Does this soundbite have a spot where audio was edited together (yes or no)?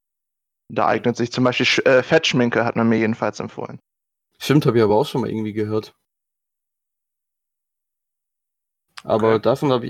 no